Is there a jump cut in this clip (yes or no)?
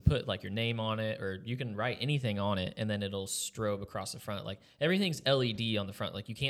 no